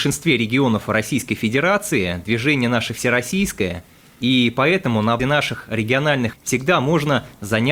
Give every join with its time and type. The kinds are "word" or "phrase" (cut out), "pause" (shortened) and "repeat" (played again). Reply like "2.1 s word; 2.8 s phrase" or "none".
5.2 s word; 6.3 s word